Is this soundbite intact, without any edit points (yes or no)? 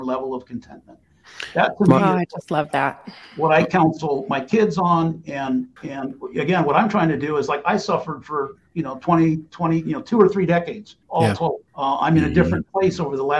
no